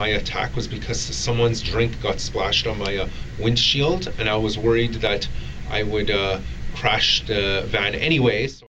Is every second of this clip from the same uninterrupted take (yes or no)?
yes